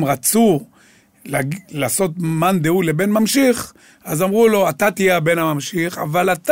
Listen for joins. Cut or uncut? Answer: uncut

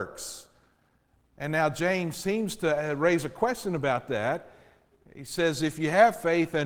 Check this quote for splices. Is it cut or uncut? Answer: uncut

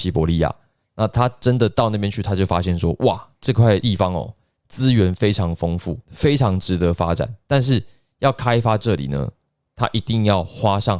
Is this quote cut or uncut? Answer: uncut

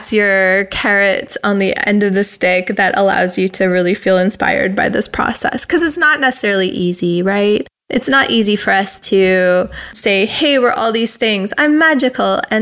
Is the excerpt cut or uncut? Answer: uncut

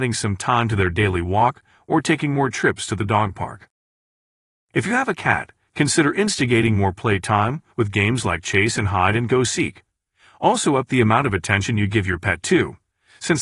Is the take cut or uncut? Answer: uncut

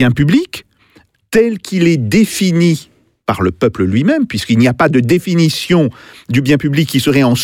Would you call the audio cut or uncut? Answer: uncut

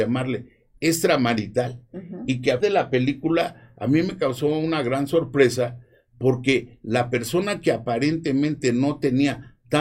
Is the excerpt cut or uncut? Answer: cut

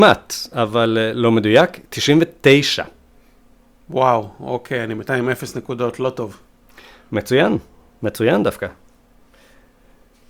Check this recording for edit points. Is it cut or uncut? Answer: uncut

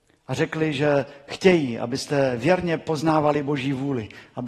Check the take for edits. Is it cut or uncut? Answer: uncut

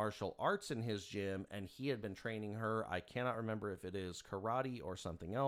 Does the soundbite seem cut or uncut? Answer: uncut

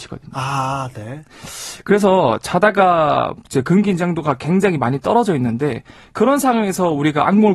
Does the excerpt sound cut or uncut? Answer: uncut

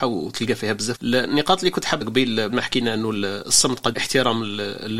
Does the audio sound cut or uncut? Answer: cut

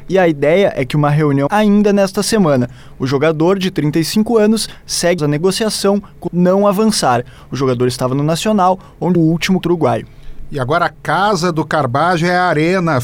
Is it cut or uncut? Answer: cut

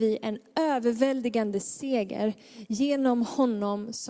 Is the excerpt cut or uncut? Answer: uncut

